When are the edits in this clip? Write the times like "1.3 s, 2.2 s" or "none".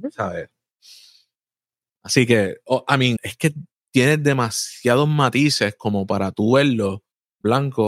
3.2 s